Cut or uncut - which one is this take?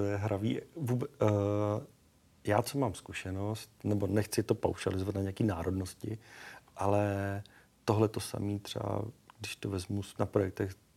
uncut